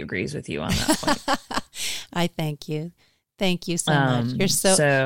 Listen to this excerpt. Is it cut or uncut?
uncut